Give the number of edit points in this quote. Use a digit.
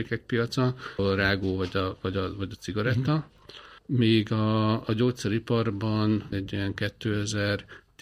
3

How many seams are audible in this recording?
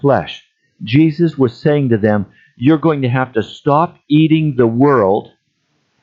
0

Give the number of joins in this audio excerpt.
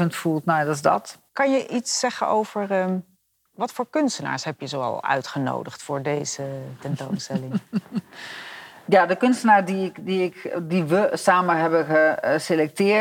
2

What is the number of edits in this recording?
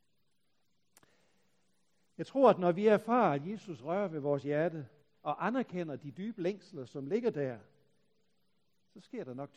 1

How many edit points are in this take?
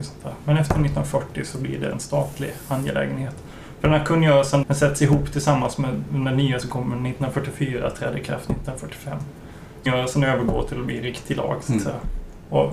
4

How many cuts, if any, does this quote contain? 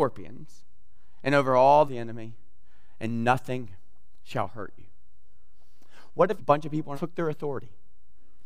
3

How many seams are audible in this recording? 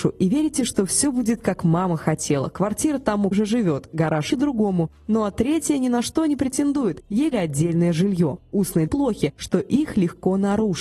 4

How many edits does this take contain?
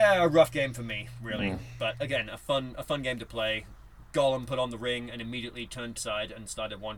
2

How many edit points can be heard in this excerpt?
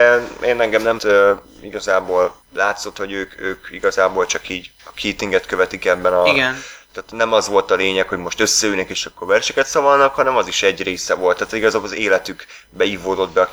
3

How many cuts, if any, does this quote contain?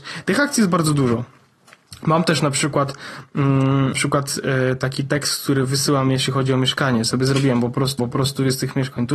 2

